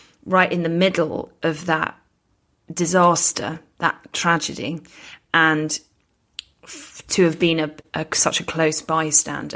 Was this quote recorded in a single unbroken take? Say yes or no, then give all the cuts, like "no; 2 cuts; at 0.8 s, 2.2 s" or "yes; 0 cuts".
yes; 0 cuts